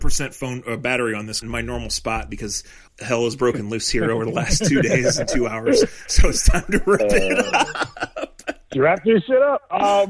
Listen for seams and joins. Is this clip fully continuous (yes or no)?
no